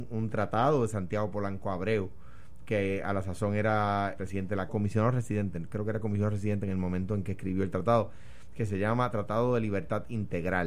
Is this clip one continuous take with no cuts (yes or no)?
no